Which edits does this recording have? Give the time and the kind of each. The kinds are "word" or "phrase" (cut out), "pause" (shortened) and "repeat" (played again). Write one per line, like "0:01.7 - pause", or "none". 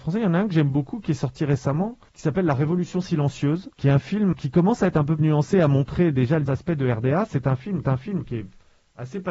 0:02.1 - pause
0:03.7 - pause
0:04.3 - word
0:05.2 - word
0:06.5 - word
0:07.8 - repeat